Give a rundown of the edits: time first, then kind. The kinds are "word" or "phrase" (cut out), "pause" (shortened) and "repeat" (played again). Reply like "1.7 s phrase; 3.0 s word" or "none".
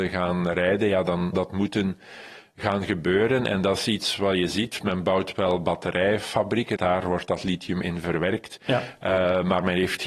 1.3 s word; 6.8 s phrase; 7.8 s word